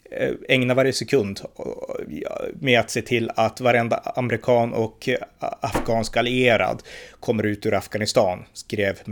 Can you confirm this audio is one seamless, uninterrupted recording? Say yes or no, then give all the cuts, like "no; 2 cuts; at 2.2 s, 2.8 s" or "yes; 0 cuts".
yes; 0 cuts